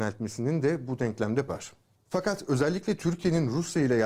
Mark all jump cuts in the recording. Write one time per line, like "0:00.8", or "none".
0:01.5